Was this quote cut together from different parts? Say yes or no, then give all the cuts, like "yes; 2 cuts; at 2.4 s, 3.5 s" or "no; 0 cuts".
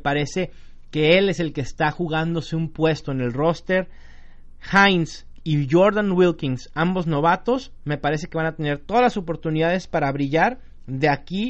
no; 0 cuts